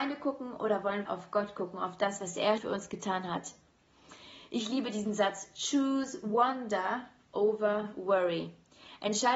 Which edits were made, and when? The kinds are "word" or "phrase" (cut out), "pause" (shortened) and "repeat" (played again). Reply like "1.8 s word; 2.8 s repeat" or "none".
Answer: 1.1 s word; 2.6 s word